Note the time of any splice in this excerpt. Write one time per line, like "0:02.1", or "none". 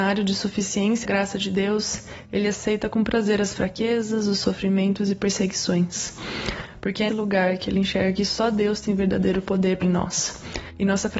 0:01.0
0:07.1
0:09.8

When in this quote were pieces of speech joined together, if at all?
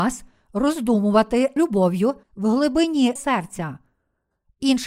0:01.6
0:02.2
0:03.2

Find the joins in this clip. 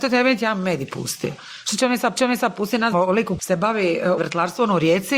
0:02.2
0:02.9
0:03.4
0:04.2

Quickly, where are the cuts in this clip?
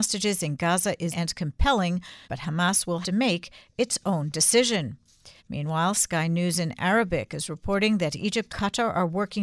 0:01.1
0:02.2
0:03.0
0:05.4
0:08.5

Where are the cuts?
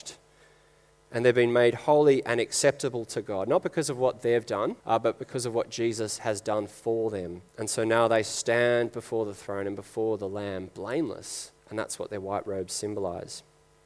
0:04.8
0:07.5
0:11.6

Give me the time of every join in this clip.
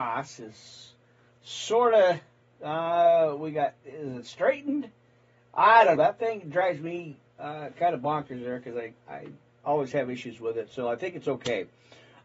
0:06.0

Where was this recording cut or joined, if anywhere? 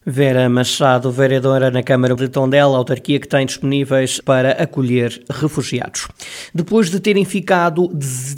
0:02.2
0:04.2

